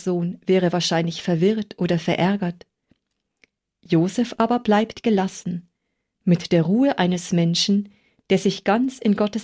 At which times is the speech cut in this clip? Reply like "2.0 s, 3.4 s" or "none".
none